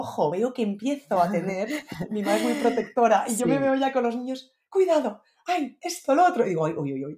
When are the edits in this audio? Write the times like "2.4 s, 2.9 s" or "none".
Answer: none